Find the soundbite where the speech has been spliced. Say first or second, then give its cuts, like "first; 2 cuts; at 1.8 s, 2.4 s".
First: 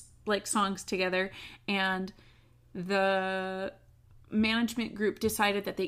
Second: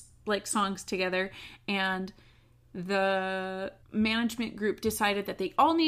second; 1 cut; at 3.8 s